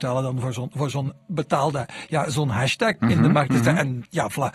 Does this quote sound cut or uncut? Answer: uncut